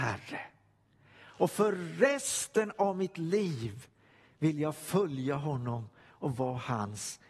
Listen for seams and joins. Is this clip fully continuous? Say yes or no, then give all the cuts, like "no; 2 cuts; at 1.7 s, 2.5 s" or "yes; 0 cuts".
yes; 0 cuts